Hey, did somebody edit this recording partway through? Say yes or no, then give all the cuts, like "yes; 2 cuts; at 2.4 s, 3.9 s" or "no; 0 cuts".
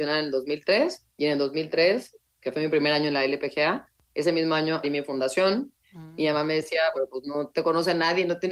yes; 3 cuts; at 1.1 s, 4.8 s, 6.9 s